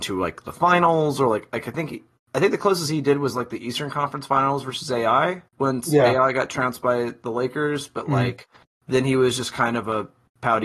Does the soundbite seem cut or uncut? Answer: cut